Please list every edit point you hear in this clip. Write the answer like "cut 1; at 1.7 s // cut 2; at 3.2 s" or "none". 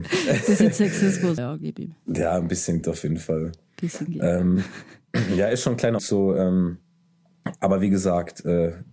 cut 1; at 1.4 s // cut 2; at 2.8 s // cut 3; at 6.0 s